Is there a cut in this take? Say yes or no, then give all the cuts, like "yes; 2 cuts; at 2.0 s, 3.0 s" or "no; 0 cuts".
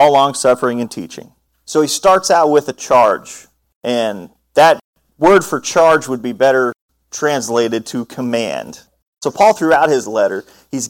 no; 0 cuts